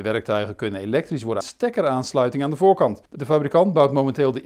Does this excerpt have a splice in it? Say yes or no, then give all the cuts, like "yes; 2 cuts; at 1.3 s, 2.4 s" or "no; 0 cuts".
yes; 2 cuts; at 1.4 s, 3.1 s